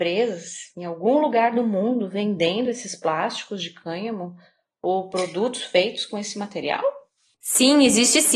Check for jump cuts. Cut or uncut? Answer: uncut